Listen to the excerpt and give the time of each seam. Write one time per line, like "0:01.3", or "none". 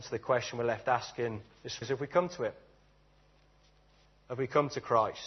0:01.8

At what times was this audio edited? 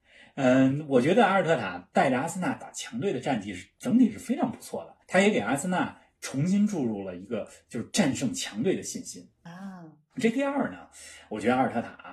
0:05.0

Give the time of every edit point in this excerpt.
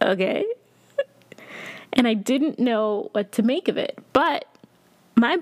none

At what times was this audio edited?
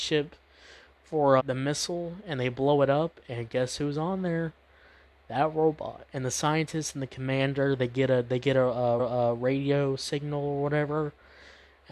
0:01.4
0:09.0

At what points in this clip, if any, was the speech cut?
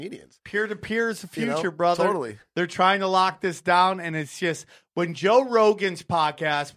none

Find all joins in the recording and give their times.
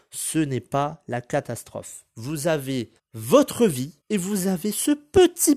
0:03.0
0:04.0

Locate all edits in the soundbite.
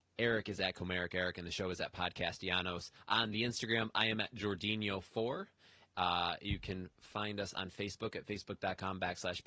0:06.9

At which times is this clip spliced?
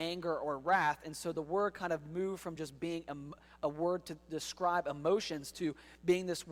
none

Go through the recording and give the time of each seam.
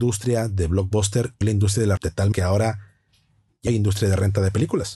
0:01.4
0:02.0
0:02.3
0:03.7

